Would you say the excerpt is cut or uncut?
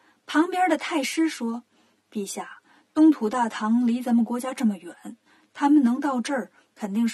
uncut